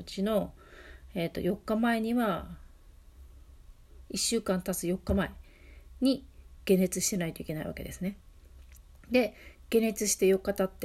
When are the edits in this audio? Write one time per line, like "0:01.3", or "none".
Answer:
0:08.9